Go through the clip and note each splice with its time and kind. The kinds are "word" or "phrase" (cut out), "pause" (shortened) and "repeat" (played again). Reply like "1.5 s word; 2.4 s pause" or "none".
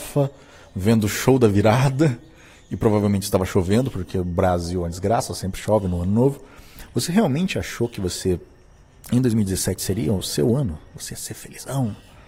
none